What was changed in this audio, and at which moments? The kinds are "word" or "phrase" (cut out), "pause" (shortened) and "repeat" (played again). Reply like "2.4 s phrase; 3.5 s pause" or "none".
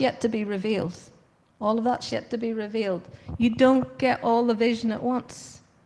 none